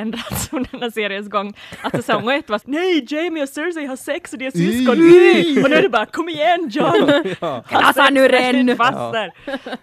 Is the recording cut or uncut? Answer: cut